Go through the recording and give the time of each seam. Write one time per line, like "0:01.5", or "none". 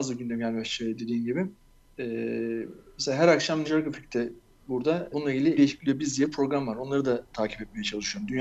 0:03.6
0:05.1
0:05.6